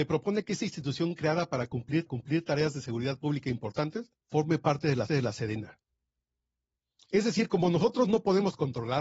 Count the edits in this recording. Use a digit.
3